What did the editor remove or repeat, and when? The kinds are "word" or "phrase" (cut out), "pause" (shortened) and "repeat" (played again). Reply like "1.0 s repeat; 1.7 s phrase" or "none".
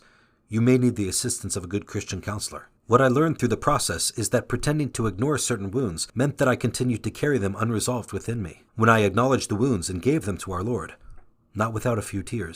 2.8 s pause; 6.1 s pause; 8.7 s pause